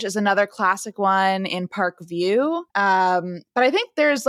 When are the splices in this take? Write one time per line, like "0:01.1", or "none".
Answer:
0:02.7